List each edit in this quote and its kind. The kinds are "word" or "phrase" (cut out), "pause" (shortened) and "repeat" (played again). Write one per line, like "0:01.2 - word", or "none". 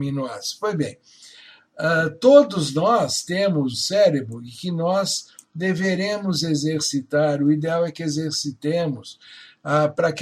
0:03.7 - word